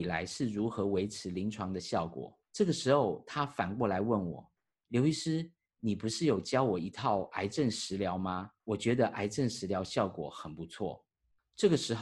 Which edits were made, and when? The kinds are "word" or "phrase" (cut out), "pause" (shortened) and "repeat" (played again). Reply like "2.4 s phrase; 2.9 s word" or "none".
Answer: 2.4 s pause; 4.6 s pause; 8.6 s pause